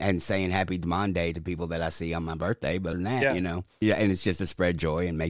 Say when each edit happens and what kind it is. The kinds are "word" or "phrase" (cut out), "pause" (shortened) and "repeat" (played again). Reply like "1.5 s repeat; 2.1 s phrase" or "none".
2.9 s word; 3.8 s word